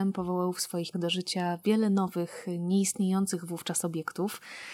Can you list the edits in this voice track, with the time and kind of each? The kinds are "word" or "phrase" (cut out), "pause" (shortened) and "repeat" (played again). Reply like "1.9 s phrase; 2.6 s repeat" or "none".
0.9 s word